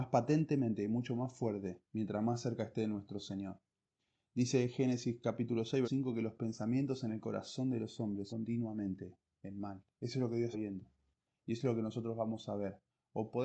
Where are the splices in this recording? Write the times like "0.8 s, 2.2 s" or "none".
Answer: 1.8 s, 5.8 s, 8.3 s, 10.5 s